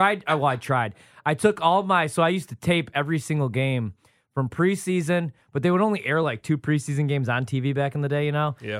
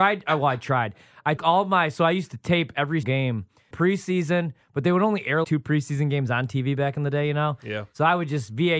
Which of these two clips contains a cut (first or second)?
second